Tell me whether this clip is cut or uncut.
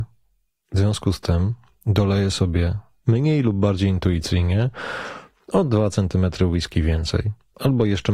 uncut